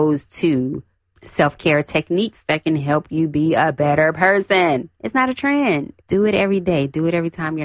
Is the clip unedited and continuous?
no; 1 cut; at 6.0 s

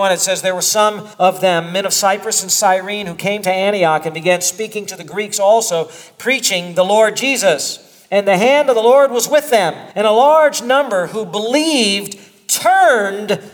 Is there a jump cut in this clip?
yes; 2 cuts; at 1.1 s, 9.9 s

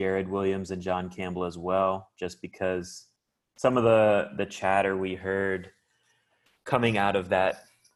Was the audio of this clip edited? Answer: no; 0 cuts

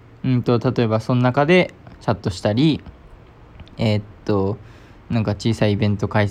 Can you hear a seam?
no; 0 cuts

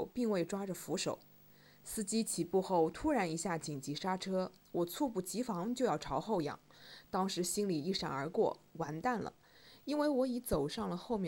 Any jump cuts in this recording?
no; 0 cuts

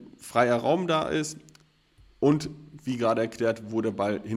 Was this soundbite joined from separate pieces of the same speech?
no; 0 cuts

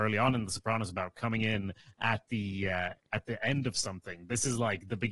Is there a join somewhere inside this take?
no; 0 cuts

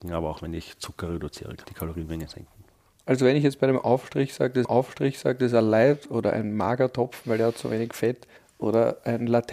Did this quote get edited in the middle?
yes; 3 cuts; at 1.6 s, 4.6 s, 8.4 s

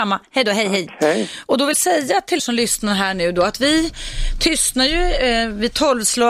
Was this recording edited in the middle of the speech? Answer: yes; 2 cuts; at 1.7 s, 2.4 s

